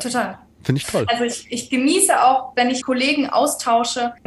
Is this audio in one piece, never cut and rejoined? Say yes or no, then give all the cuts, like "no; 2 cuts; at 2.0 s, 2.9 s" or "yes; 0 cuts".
no; 1 cut; at 2.8 s